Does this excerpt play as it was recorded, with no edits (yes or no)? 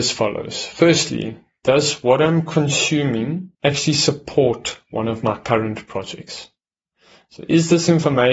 no